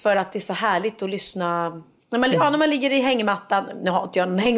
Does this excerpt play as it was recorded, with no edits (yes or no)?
no